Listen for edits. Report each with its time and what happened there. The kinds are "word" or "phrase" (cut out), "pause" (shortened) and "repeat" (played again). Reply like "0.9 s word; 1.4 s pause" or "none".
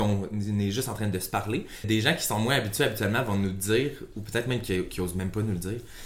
1.8 s word